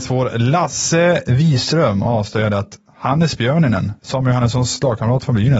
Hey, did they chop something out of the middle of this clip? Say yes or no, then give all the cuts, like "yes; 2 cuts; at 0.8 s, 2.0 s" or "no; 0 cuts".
no; 0 cuts